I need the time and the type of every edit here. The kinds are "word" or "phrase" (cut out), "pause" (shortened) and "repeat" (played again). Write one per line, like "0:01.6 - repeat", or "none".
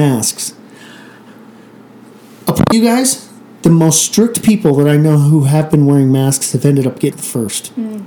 0:02.7 - word
0:07.1 - word